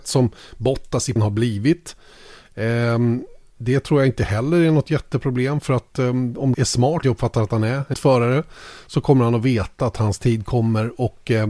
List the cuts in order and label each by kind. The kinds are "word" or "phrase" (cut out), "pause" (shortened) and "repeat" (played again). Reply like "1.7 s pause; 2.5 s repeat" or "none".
1.2 s word; 6.5 s word; 7.0 s word; 7.9 s word